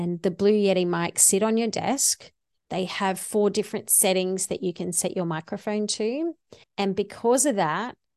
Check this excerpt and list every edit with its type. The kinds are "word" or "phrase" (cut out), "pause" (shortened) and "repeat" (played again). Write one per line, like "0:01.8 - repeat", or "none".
0:02.6 - pause
0:06.6 - pause